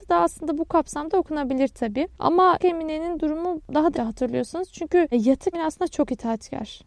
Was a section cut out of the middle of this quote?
yes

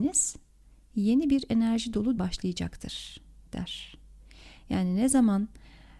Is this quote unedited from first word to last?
no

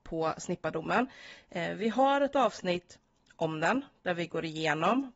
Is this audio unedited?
yes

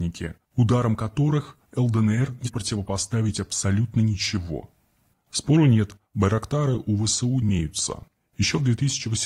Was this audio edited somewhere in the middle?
yes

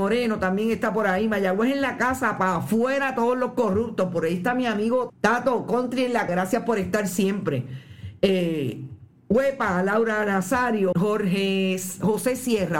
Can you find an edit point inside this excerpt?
yes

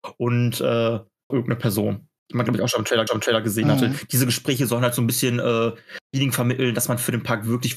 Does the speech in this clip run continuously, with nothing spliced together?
no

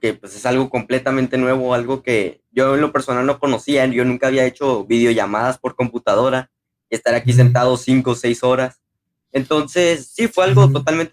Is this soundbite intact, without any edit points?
yes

